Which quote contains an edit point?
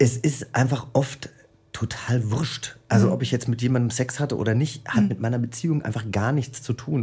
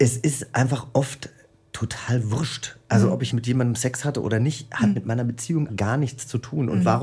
second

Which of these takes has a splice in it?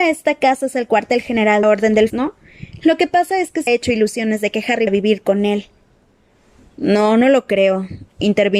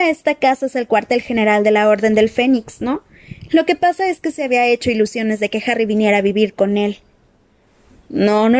first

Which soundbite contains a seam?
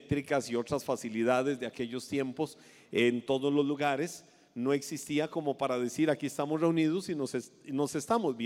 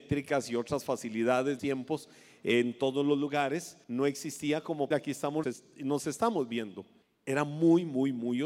second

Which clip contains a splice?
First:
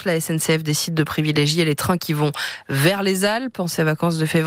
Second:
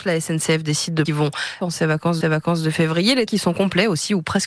second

